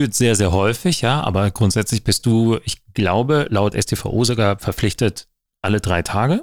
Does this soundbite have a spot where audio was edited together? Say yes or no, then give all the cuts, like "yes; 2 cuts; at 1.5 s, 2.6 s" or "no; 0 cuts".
no; 0 cuts